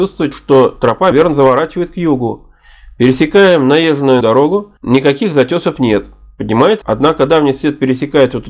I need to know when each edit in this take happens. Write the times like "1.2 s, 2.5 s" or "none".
1.1 s, 4.2 s, 4.8 s, 6.8 s